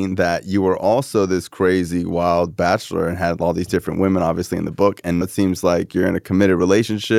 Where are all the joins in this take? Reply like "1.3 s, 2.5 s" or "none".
5.2 s